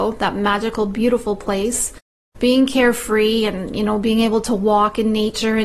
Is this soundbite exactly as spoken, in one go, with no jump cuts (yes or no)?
yes